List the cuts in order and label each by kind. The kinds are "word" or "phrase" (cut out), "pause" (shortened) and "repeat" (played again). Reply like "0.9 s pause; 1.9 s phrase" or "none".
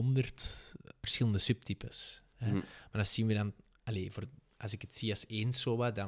none